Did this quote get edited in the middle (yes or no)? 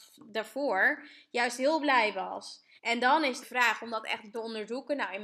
yes